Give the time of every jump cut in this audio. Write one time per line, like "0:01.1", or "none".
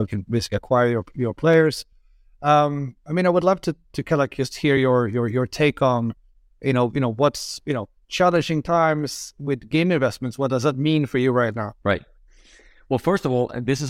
none